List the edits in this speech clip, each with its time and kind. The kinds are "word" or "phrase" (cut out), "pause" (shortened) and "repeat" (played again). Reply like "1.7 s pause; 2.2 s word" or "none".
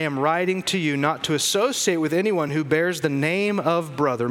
none